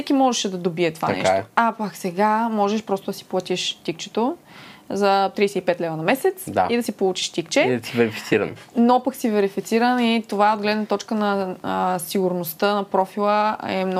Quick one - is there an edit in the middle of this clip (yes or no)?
no